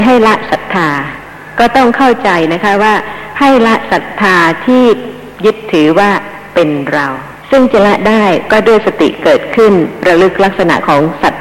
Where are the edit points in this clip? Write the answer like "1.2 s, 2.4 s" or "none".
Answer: 7.4 s